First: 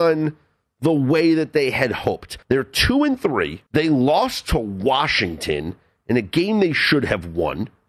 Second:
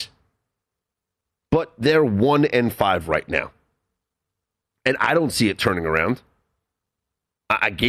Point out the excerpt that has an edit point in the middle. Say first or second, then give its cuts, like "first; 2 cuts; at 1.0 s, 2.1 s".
first; 2 cuts; at 2.4 s, 3.7 s